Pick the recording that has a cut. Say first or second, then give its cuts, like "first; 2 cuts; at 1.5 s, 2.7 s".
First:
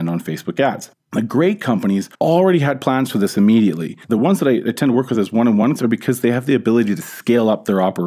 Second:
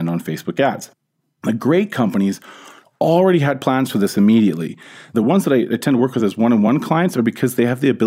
first; 4 cuts; at 1.0 s, 2.1 s, 4.0 s, 5.8 s